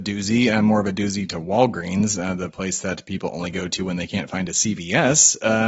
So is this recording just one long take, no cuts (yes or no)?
yes